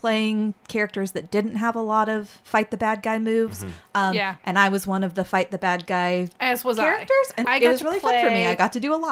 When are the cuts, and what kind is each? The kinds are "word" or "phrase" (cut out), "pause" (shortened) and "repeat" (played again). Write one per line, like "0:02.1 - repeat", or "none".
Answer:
0:07.4 - word